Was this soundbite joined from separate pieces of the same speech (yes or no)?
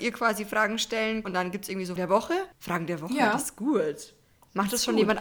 yes